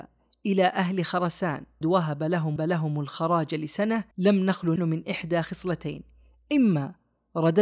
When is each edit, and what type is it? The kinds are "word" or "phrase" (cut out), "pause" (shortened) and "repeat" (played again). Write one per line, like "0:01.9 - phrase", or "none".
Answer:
0:01.8 - phrase
0:02.6 - repeat
0:04.1 - pause
0:04.8 - word